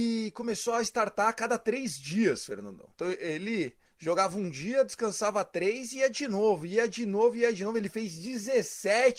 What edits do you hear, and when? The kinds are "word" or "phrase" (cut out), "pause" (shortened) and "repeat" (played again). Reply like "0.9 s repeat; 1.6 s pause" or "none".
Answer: 2.9 s pause; 3.9 s pause